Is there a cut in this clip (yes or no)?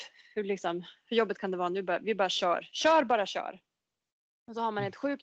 no